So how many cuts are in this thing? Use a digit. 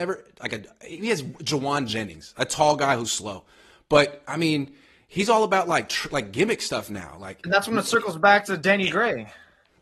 0